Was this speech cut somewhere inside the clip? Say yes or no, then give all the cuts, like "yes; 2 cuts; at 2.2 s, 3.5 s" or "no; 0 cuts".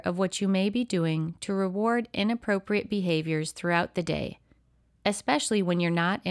no; 0 cuts